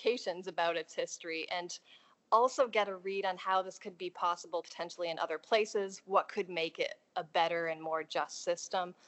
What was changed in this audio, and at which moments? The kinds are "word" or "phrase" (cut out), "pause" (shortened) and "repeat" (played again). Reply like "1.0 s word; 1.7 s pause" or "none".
none